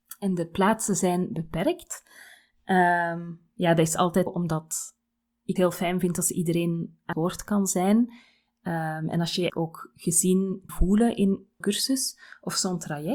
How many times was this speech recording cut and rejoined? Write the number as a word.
six